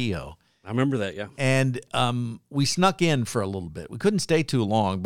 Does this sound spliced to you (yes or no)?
no